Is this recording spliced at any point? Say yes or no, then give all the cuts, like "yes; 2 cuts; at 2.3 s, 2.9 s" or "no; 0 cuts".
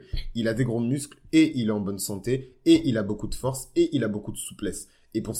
no; 0 cuts